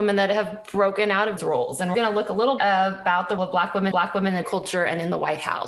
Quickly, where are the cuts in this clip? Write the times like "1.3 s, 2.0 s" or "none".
1.4 s, 1.9 s, 2.6 s, 3.4 s, 3.9 s, 4.4 s

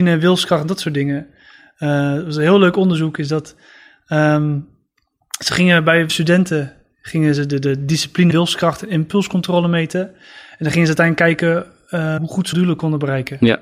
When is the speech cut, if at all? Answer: 6.1 s, 8.3 s, 12.2 s, 12.5 s

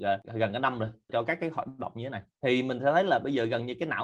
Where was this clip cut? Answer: none

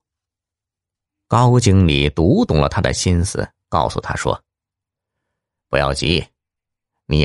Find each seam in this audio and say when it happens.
none

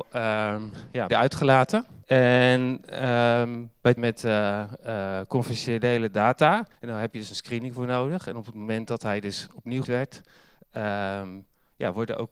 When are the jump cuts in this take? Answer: 1.1 s, 2.0 s, 4.0 s, 6.7 s, 9.8 s

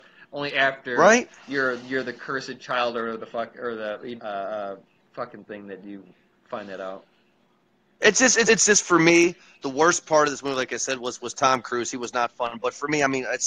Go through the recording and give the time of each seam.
4.2 s, 8.5 s

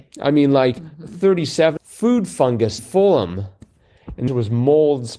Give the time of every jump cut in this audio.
1.8 s, 2.8 s, 4.3 s

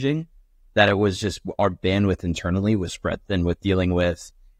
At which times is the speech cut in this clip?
2.9 s

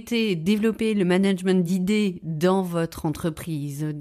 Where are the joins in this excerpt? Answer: none

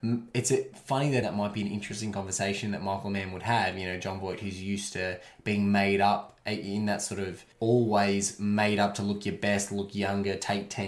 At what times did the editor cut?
1.2 s, 7.5 s

